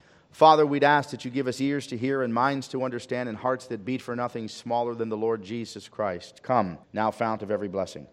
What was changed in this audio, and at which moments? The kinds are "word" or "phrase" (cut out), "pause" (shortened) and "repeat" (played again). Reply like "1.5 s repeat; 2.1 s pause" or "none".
6.8 s pause